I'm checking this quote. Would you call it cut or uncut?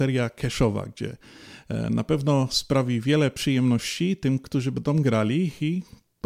uncut